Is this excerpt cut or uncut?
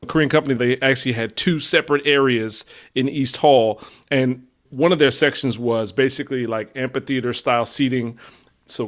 uncut